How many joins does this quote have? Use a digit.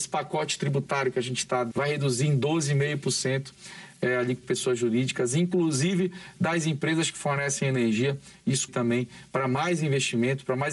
3